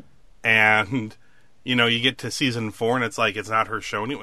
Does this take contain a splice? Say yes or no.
no